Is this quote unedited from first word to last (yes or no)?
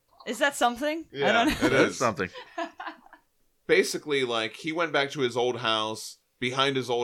yes